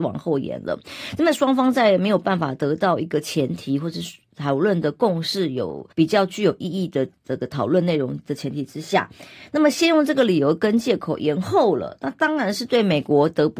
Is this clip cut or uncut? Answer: cut